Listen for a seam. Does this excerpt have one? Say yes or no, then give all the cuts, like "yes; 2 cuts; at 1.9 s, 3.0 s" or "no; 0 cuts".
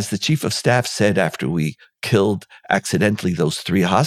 no; 0 cuts